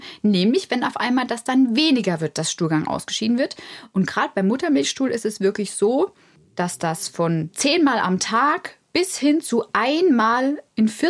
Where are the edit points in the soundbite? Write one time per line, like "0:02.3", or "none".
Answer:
none